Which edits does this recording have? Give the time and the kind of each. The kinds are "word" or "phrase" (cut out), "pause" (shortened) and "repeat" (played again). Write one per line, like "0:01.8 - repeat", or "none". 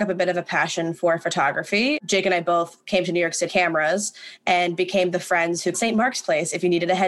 0:03.5 - word
0:05.7 - phrase